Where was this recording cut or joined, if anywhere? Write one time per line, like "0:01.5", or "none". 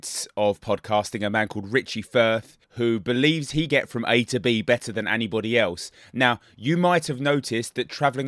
0:02.6
0:03.7